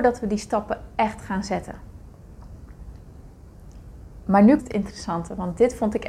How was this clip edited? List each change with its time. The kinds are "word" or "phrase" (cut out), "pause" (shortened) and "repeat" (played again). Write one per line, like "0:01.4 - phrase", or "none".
0:04.6 - word